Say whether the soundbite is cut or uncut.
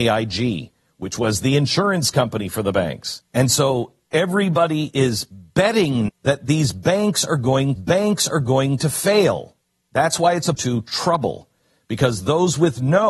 cut